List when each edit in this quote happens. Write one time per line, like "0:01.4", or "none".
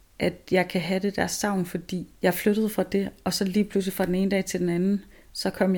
0:02.1